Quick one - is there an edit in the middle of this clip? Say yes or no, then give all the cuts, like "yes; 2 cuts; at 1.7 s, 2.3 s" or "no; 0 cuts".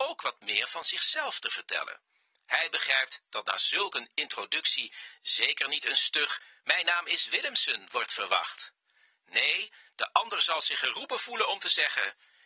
no; 0 cuts